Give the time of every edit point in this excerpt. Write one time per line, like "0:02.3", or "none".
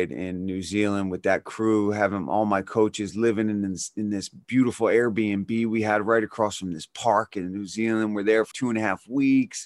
0:08.5